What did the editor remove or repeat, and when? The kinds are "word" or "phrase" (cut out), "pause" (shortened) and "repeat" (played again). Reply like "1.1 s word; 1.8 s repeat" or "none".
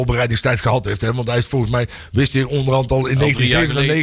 none